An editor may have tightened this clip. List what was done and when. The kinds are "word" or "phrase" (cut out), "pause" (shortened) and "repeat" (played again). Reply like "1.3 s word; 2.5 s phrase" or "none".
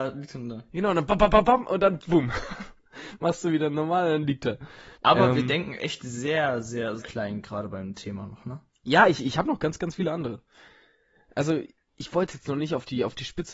1.1 s word; 4.9 s pause; 7.0 s word; 8.7 s pause; 11.9 s word